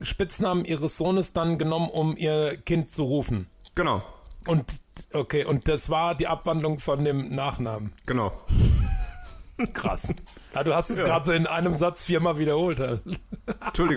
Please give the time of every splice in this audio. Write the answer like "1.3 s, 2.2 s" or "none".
none